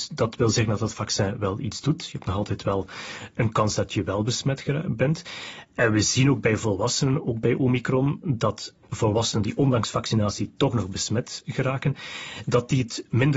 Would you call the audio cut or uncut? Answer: uncut